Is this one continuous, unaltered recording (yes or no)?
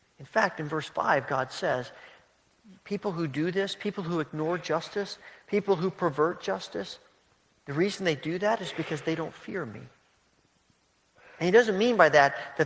yes